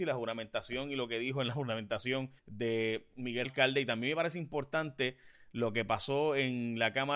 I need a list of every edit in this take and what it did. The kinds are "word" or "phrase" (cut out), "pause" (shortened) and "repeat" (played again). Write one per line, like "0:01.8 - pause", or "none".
0:02.4 - pause
0:03.4 - phrase